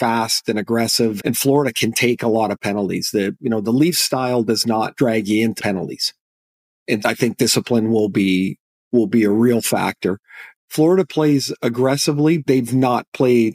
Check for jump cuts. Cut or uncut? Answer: cut